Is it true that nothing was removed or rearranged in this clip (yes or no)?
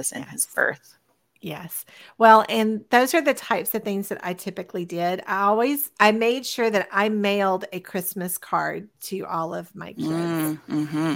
yes